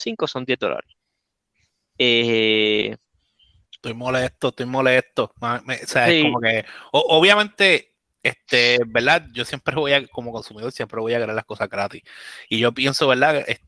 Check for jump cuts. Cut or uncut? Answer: uncut